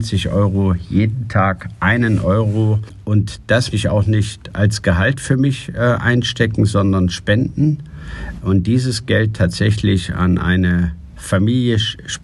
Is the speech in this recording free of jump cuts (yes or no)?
no